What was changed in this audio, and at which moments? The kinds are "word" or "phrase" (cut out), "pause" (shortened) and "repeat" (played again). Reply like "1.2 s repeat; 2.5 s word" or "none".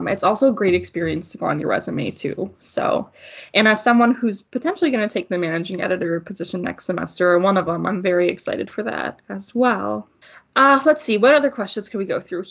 10.2 s pause